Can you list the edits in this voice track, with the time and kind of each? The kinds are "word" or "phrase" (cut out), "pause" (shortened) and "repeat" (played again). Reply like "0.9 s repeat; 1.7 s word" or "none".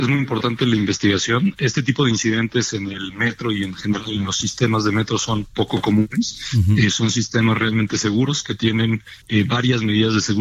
9.2 s pause